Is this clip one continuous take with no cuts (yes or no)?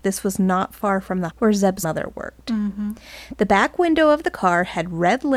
no